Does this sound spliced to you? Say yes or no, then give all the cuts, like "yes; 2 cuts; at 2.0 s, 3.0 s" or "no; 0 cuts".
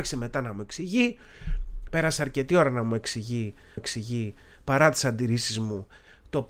yes; 1 cut; at 3.8 s